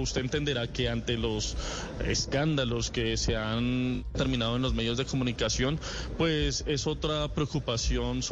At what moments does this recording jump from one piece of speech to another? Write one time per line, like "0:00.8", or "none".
none